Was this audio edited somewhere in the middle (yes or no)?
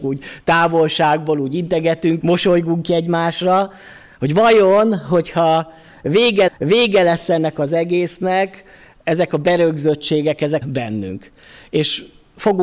yes